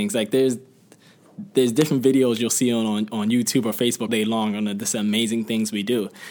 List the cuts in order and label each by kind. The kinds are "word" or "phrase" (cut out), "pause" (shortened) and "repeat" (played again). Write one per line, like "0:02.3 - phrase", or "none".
0:04.1 - word